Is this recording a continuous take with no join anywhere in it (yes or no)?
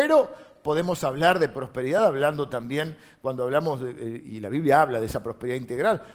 yes